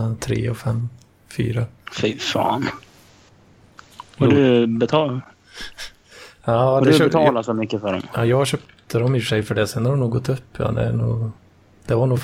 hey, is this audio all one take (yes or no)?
yes